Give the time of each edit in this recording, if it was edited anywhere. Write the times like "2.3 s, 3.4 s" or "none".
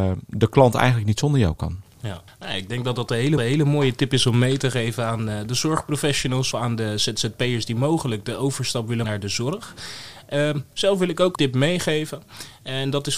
2.3 s, 3.4 s, 6.5 s, 9.0 s, 11.4 s